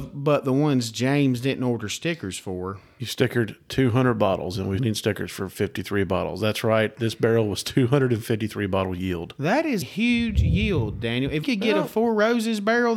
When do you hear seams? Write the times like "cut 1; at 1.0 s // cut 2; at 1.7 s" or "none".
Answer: cut 1; at 4.8 s // cut 2; at 9.8 s // cut 3; at 11.4 s

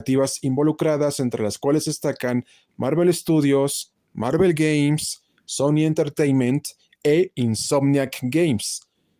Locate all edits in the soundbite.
none

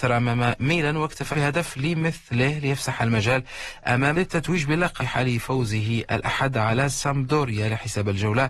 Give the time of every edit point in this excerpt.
cut 1; at 1.3 s // cut 2; at 4.1 s // cut 3; at 5.0 s

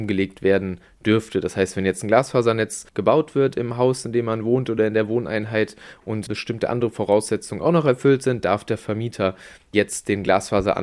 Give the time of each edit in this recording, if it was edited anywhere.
cut 1; at 2.9 s

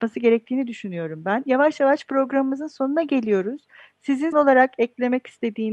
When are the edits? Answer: cut 1; at 4.3 s

